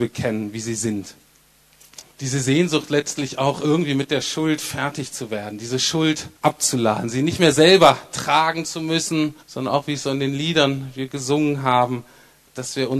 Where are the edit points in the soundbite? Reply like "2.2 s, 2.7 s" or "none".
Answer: 2.1 s, 6.4 s, 9.4 s